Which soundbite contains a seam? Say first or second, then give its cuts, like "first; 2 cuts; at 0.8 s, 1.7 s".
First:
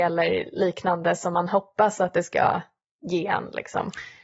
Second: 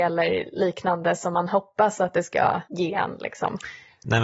second; 1 cut; at 2.7 s